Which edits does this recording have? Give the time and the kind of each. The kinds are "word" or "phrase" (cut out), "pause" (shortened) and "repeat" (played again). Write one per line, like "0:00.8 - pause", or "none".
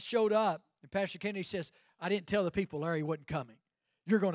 none